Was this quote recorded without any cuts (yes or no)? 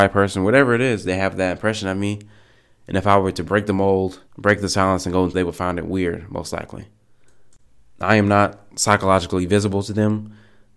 no